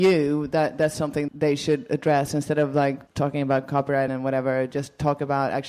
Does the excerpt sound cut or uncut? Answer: cut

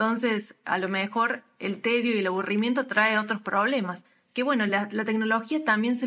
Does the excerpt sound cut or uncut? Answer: uncut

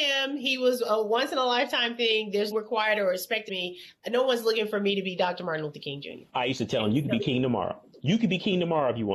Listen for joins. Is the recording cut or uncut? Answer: cut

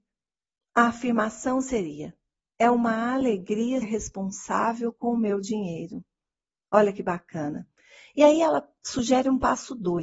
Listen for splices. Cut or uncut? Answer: cut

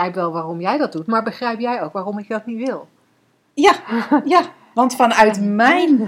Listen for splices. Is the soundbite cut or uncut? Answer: uncut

